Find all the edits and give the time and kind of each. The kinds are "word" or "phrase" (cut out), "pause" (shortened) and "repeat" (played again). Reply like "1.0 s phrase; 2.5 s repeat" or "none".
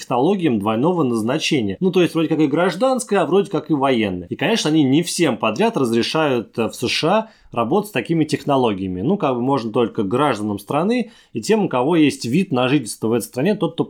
none